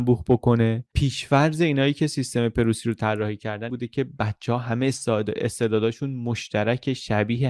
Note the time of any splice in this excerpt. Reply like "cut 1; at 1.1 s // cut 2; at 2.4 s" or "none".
cut 1; at 3.7 s

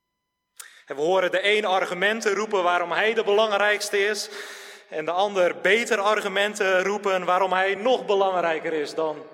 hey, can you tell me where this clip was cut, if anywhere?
none

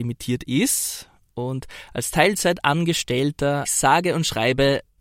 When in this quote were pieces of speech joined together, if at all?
cut 1; at 3.6 s

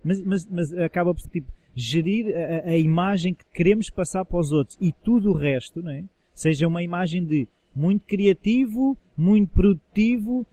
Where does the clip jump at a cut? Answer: cut 1; at 1.2 s // cut 2; at 3.5 s

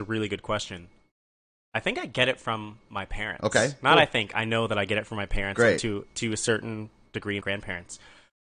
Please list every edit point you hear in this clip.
cut 1; at 7.4 s

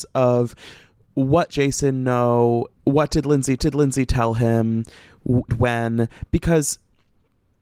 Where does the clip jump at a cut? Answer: cut 1; at 1.5 s // cut 2; at 2.8 s // cut 3; at 3.6 s // cut 4; at 5.5 s

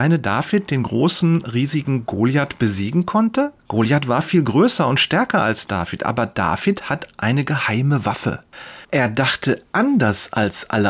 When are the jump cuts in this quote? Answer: cut 1; at 3.6 s // cut 2; at 8.8 s

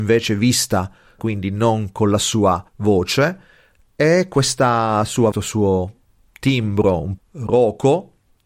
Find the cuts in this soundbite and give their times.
cut 1; at 1.2 s // cut 2; at 2.7 s // cut 3; at 5.3 s // cut 4; at 7.2 s

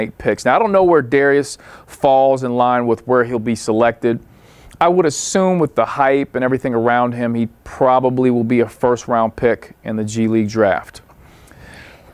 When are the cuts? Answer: none

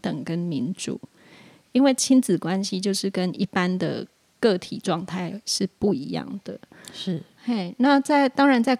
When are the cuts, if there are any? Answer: none

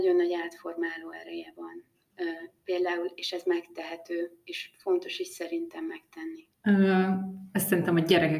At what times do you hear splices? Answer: cut 1; at 6.5 s

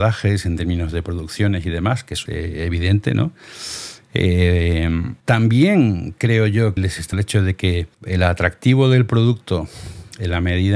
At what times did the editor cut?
cut 1; at 2.3 s // cut 2; at 5.2 s // cut 3; at 6.8 s // cut 4; at 7.1 s // cut 5; at 7.9 s

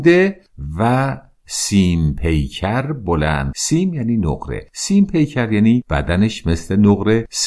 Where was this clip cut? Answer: cut 1; at 3.5 s

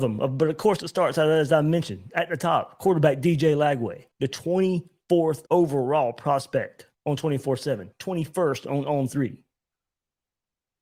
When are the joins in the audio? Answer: cut 1; at 4.1 s // cut 2; at 5.5 s // cut 3; at 6.9 s // cut 4; at 7.9 s

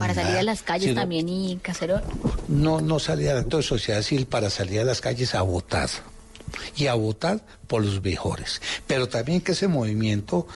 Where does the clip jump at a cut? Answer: cut 1; at 3.5 s

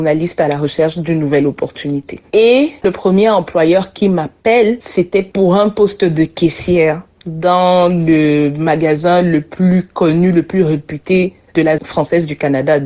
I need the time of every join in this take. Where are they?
cut 1; at 11.8 s

